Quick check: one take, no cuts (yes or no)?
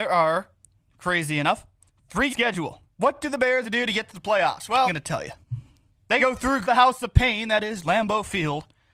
no